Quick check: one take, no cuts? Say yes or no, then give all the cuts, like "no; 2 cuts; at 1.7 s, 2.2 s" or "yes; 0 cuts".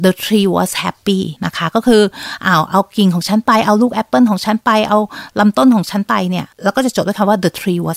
no; 2 cuts; at 1.4 s, 6.5 s